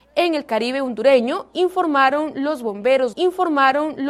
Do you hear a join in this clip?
yes; 1 cut; at 3.1 s

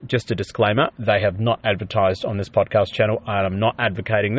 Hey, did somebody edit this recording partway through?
no; 0 cuts

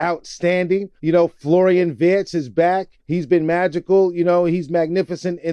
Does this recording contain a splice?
yes; 2 cuts; at 1.0 s, 3.0 s

